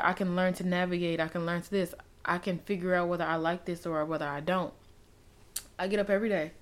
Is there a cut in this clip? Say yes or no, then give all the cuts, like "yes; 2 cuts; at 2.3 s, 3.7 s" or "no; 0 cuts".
no; 0 cuts